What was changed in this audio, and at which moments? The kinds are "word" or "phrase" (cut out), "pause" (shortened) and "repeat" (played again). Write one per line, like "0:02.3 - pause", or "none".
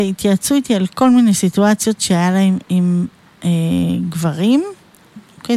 none

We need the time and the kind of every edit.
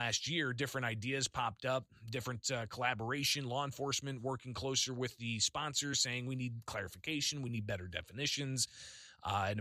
none

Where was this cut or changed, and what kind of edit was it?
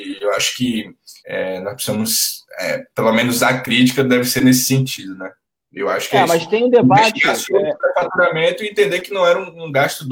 0:01.2 - pause
0:05.4 - pause

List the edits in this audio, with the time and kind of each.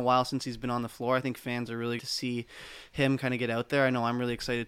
0:02.0 - phrase

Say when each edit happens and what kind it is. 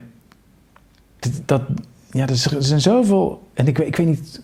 0:01.2 - word

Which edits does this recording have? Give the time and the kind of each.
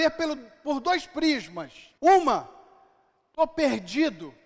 0:02.0 - pause

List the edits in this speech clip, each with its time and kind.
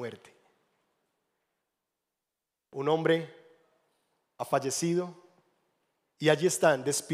none

